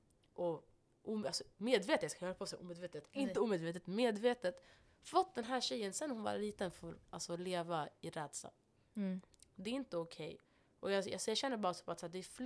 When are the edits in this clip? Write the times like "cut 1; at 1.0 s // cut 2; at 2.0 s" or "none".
none